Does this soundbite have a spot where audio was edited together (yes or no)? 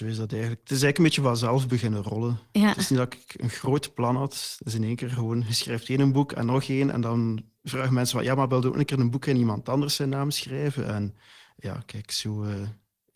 no